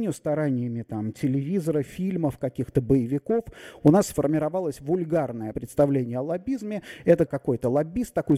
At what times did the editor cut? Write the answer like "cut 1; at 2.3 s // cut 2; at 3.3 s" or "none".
cut 1; at 5.5 s // cut 2; at 7.3 s